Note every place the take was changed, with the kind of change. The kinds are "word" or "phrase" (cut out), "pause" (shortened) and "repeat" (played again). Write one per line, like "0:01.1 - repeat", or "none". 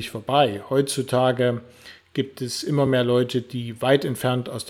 none

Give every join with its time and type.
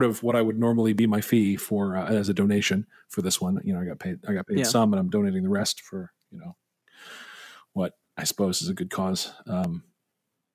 none

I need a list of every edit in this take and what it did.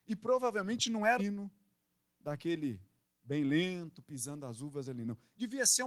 0:01.2 - word
0:03.0 - pause

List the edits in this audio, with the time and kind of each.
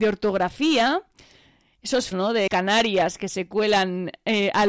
0:02.1 - word
0:02.5 - word

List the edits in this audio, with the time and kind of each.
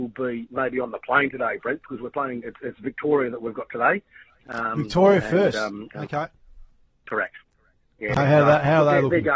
none

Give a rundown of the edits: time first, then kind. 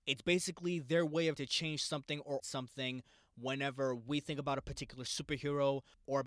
0:01.4 - word
0:02.4 - word

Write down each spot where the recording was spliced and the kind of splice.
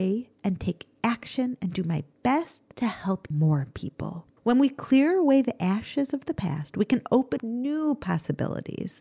0:02.7 - pause
0:03.3 - word
0:04.4 - pause
0:07.4 - word

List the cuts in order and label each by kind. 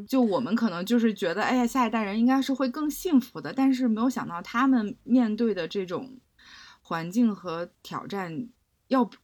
none

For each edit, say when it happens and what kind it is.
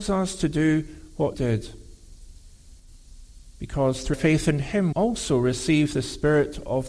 0:01.3 - word
0:04.1 - word
0:04.9 - word

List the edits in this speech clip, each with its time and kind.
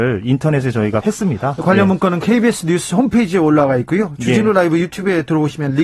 0:01.0 - word

